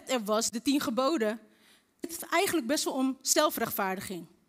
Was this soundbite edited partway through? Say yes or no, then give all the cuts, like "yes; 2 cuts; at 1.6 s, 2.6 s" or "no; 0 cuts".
yes; 1 cut; at 2.0 s